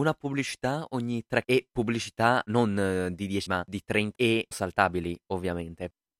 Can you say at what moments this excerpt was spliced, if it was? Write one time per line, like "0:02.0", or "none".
0:01.4
0:03.5
0:04.2
0:04.5